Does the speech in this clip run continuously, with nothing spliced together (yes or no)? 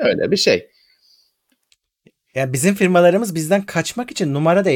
yes